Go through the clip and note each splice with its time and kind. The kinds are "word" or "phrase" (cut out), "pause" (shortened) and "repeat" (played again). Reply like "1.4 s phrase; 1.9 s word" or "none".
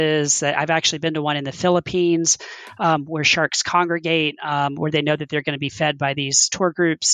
none

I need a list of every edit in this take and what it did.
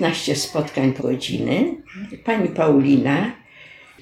1.0 s word

